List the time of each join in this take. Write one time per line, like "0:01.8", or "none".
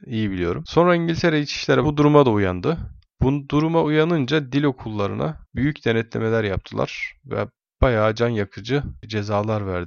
0:01.8